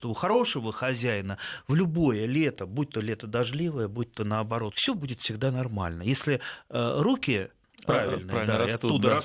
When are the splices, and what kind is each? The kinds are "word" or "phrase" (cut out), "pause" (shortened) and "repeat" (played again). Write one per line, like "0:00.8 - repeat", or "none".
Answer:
0:04.7 - word